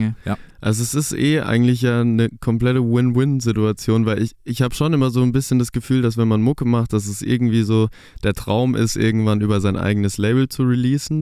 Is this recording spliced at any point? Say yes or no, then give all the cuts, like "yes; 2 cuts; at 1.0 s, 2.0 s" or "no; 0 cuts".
no; 0 cuts